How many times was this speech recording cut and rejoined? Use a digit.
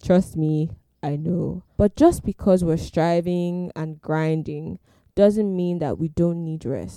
1